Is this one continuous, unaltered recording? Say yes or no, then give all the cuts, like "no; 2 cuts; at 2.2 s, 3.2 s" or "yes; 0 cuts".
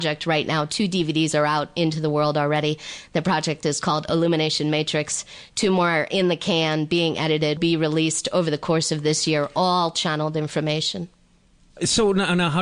no; 1 cut; at 7.6 s